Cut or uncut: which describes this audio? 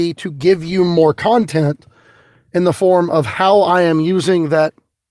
uncut